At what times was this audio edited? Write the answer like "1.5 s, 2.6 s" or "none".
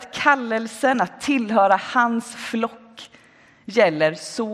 none